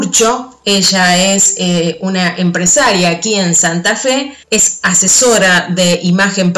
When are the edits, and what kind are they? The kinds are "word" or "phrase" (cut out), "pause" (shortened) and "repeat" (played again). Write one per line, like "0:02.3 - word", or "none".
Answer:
0:04.4 - pause

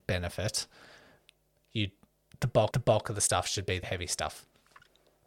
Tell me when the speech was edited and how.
0:02.7 - repeat
0:03.8 - word

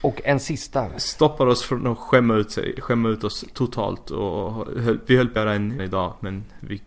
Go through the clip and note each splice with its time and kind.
0:05.4 - word
0:05.8 - word

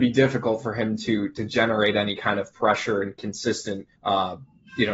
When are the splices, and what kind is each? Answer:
0:04.0 - pause

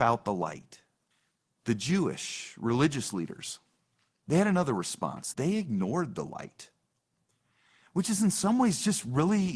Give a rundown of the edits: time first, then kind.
0:01.1 - pause
0:05.3 - word

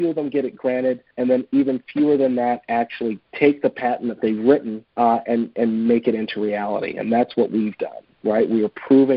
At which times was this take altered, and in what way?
0:01.1 - pause
0:03.2 - pause
0:04.9 - pause

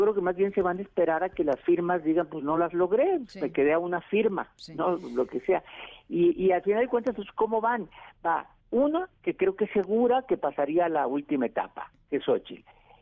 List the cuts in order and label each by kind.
none

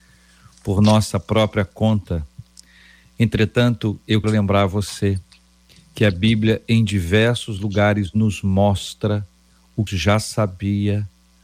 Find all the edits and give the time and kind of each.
0:04.2 - word
0:09.9 - phrase

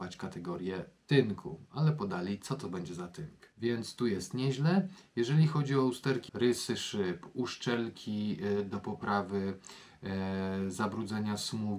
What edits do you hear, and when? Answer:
0:03.5 - pause
0:06.3 - word

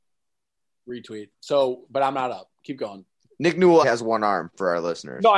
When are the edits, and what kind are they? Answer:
0:01.3 - pause
0:02.5 - pause
0:03.3 - pause
0:03.8 - word

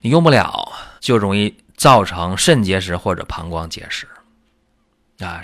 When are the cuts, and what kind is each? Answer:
0:01.0 - pause

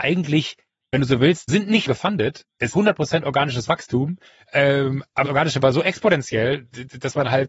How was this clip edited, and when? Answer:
0:00.9 - word
0:01.5 - word
0:01.9 - word
0:02.7 - word
0:05.2 - word
0:05.6 - word

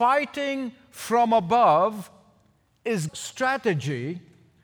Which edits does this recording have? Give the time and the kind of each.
0:03.1 - word

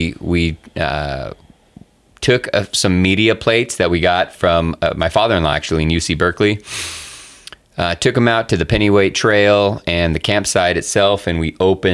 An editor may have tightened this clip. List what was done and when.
none

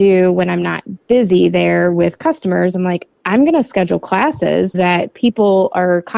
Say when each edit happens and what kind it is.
0:04.7 - word

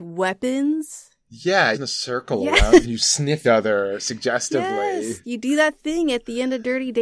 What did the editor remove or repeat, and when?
0:01.7 - phrase
0:02.8 - phrase
0:03.4 - word

